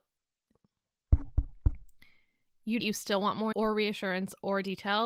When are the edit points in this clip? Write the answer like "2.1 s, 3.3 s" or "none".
2.8 s, 3.5 s